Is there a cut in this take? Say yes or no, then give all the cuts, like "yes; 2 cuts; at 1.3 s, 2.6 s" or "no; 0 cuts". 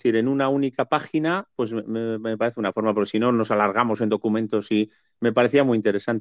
no; 0 cuts